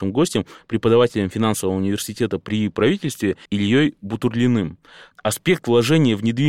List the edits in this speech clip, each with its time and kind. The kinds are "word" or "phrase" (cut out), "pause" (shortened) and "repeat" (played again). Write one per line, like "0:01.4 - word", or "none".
0:03.5 - pause